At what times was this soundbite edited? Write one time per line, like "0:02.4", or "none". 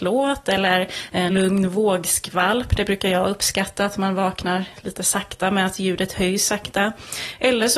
0:01.3